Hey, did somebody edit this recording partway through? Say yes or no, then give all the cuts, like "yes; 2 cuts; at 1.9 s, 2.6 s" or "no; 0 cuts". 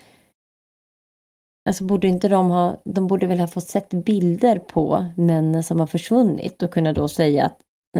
no; 0 cuts